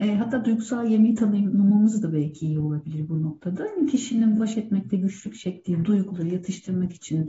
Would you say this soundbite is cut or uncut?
uncut